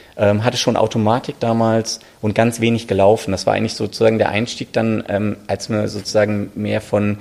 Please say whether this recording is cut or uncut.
uncut